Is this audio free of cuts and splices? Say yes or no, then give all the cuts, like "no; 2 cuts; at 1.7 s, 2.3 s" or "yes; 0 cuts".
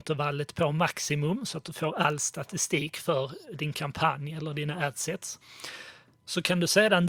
yes; 0 cuts